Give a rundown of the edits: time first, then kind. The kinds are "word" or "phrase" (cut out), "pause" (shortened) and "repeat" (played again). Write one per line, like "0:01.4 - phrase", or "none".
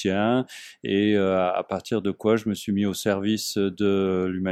none